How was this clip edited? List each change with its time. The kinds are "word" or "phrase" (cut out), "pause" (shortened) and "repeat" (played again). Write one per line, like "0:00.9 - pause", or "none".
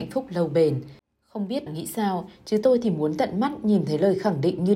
0:01.7 - word